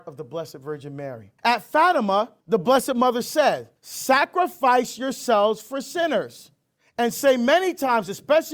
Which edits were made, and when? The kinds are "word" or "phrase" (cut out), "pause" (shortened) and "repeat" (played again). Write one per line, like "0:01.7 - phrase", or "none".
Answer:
0:01.4 - pause
0:02.4 - pause
0:03.8 - pause
0:06.8 - pause